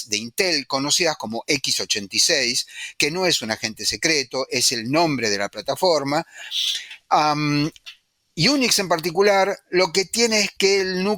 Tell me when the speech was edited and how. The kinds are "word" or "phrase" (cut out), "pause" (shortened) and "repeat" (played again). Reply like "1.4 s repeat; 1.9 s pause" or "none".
none